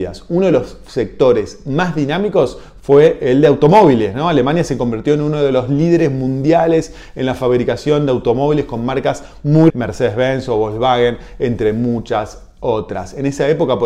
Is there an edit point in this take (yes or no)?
yes